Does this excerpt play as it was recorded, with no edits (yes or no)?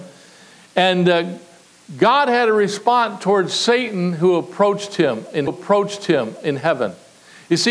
no